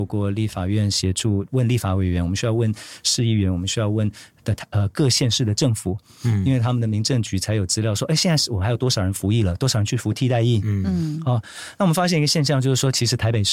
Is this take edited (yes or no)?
no